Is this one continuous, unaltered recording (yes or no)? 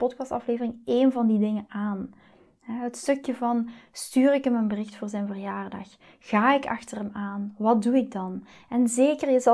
yes